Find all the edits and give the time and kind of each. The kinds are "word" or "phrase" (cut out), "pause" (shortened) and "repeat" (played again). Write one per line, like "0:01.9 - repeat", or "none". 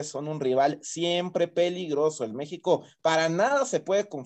none